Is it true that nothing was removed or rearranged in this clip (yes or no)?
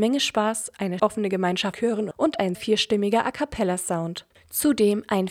no